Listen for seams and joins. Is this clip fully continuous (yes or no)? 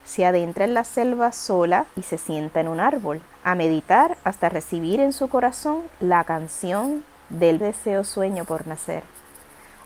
no